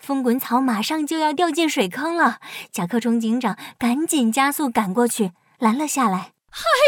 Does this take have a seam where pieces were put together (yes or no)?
no